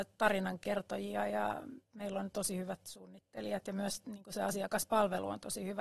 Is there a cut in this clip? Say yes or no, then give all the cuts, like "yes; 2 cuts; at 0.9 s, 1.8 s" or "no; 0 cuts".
no; 0 cuts